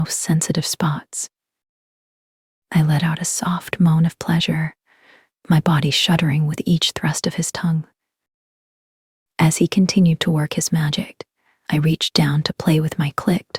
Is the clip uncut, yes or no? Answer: yes